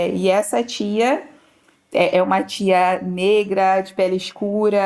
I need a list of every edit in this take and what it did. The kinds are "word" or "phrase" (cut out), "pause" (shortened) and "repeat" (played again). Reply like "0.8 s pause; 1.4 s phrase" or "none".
none